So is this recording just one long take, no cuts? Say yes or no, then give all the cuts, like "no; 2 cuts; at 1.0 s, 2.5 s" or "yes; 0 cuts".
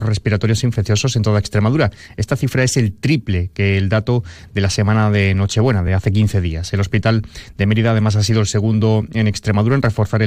yes; 0 cuts